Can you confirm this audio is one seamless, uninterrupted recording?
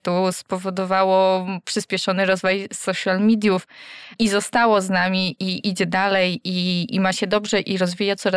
yes; 0 cuts

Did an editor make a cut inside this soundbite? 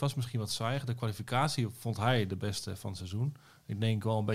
no; 0 cuts

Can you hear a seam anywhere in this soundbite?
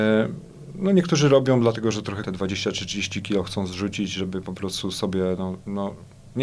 yes; 1 cut; at 2.2 s

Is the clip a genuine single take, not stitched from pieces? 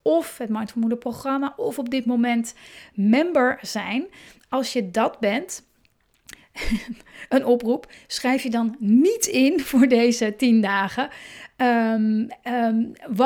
yes; 0 cuts

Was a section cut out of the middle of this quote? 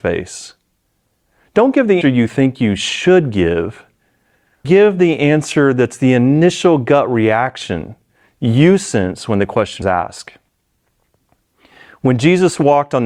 yes; 3 cuts; at 2.0 s, 4.6 s, 9.8 s

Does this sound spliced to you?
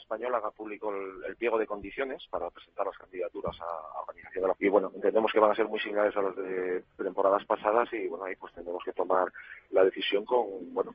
yes; 2 cuts; at 2.3 s, 4.5 s

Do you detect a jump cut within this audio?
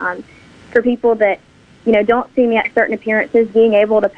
no; 0 cuts

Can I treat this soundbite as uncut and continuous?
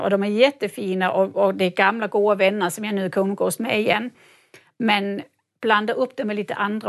yes; 0 cuts

